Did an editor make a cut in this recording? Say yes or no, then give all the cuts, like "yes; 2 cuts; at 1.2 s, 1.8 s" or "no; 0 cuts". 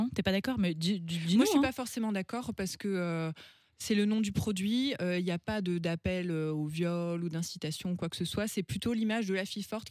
no; 0 cuts